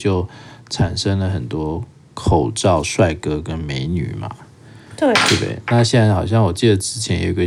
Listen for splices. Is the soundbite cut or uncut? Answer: uncut